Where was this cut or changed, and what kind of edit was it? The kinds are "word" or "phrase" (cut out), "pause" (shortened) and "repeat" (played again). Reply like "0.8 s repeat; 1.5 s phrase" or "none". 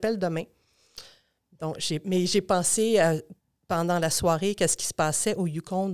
none